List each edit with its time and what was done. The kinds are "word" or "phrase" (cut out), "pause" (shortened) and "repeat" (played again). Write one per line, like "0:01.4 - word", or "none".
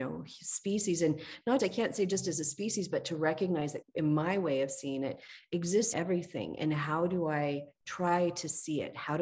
0:01.6 - word
0:03.8 - word
0:05.9 - word
0:07.8 - pause